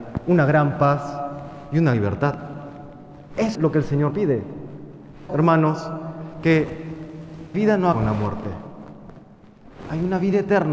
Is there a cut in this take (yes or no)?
yes